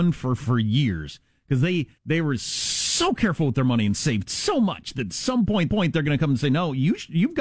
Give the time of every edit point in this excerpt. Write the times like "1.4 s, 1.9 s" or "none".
2.0 s, 5.7 s

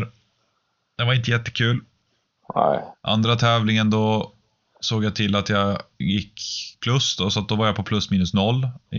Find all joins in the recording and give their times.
none

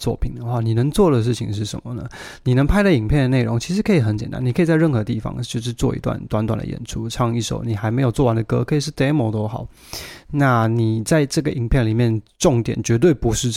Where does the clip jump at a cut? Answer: none

